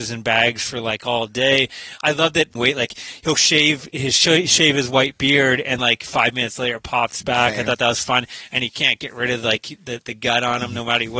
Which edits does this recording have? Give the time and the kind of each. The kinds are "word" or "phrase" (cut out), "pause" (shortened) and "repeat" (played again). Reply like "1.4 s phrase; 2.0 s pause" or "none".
2.6 s phrase; 5.8 s word